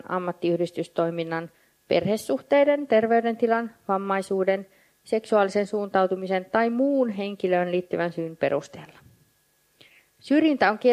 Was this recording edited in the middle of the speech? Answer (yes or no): no